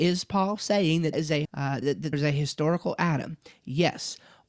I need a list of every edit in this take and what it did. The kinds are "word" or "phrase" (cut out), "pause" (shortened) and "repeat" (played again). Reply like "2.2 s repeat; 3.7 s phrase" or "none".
1.1 s word; 1.4 s word; 1.8 s word; 2.1 s word